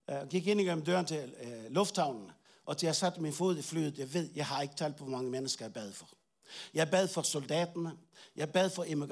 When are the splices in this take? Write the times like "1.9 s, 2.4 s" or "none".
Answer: none

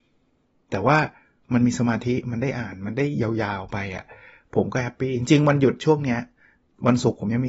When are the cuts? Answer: none

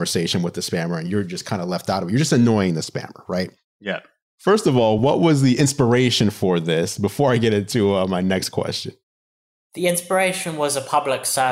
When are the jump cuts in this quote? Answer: none

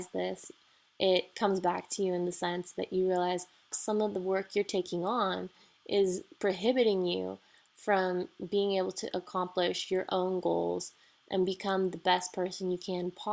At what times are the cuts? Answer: 3.7 s

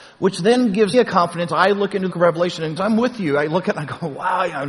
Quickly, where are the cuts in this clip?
0.9 s, 1.5 s, 2.1 s, 2.8 s

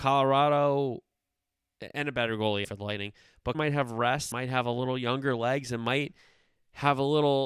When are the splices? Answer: 2.6 s, 3.5 s, 4.3 s

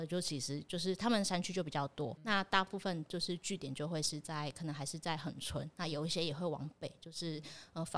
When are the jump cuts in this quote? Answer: 2.2 s

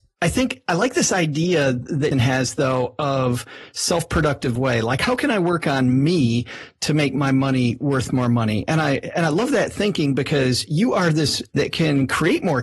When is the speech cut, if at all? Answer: 2.1 s, 11.5 s

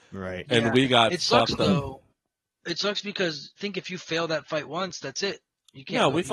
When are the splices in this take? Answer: 3.6 s

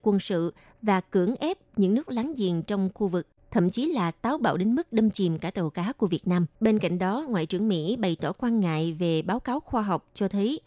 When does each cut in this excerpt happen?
6.5 s

